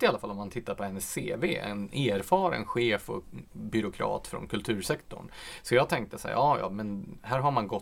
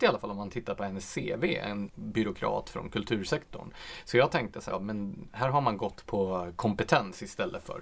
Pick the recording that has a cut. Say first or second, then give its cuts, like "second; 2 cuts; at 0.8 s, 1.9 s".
second; 3 cuts; at 1.9 s, 4.7 s, 6.1 s